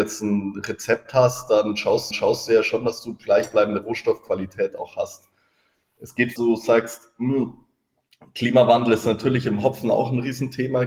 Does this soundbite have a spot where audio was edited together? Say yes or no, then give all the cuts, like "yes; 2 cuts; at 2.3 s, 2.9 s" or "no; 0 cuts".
yes; 2 cuts; at 2.1 s, 6.4 s